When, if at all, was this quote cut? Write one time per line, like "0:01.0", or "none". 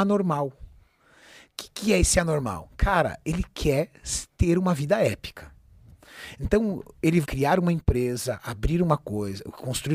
0:07.2

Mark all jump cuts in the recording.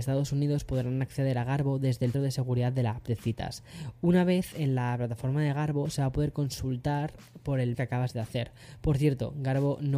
0:02.1
0:07.7

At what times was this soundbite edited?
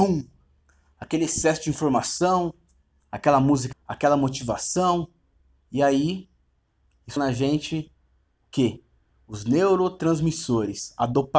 0:03.7
0:07.2

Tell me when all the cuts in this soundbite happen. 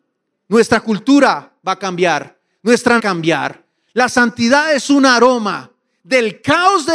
0:01.6
0:03.0

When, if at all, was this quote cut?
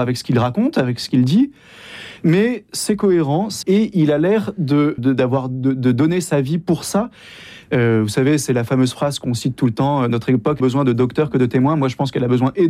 0:03.6
0:05.0
0:10.6

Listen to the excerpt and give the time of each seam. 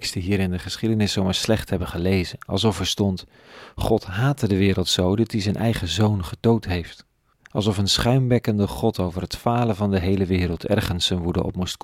0:07.3

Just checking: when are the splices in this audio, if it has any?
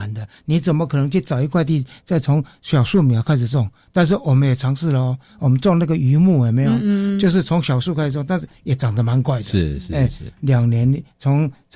none

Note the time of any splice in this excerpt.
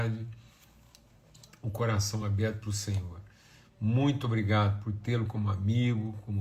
none

